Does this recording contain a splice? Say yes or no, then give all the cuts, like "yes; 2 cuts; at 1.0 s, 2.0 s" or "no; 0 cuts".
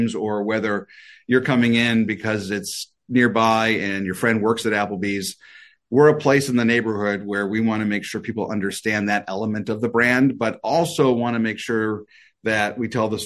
no; 0 cuts